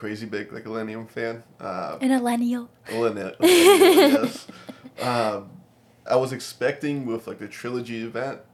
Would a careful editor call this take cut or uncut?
cut